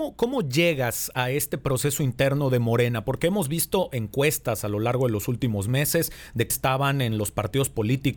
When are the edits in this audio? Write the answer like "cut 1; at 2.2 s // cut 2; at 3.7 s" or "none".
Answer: cut 1; at 6.5 s